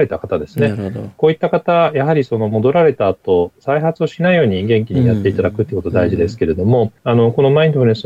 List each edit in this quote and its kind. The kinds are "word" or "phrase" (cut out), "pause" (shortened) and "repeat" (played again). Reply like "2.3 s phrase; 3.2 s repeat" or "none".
7.0 s pause